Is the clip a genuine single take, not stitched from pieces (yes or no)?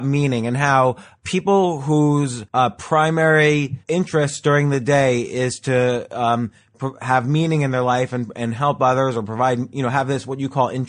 no